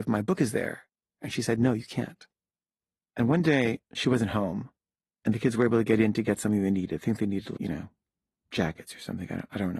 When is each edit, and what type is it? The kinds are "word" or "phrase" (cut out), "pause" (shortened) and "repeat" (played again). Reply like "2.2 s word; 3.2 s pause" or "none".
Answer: 3.8 s pause; 7.6 s word